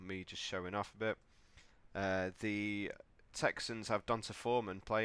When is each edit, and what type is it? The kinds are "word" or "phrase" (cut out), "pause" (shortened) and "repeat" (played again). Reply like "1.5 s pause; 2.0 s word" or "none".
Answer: none